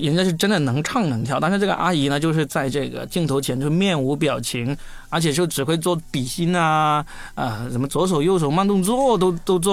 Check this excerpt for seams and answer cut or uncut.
uncut